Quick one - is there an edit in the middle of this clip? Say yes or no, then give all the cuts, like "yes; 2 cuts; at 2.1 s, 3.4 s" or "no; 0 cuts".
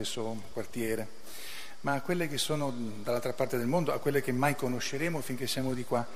no; 0 cuts